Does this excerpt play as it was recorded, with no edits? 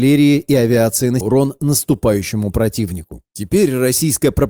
no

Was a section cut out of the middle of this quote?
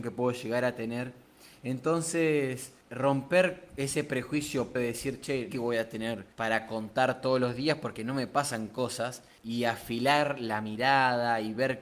yes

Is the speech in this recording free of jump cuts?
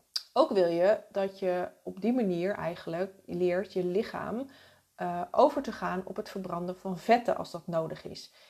yes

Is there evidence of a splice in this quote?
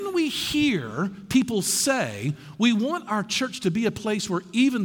no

